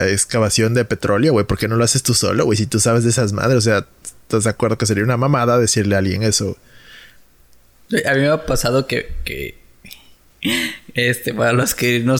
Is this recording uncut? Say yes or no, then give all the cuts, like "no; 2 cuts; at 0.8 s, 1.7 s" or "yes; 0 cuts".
yes; 0 cuts